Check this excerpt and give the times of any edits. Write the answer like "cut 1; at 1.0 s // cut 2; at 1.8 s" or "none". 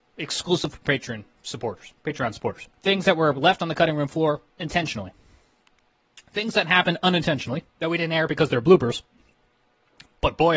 cut 1; at 2.7 s // cut 2; at 4.5 s // cut 3; at 7.7 s